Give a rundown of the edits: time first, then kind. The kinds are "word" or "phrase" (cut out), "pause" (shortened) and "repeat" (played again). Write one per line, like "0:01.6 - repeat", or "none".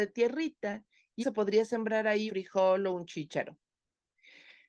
0:01.2 - word
0:02.3 - word